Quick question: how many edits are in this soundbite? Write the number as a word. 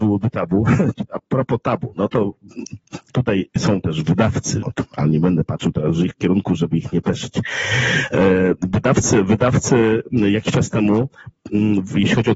two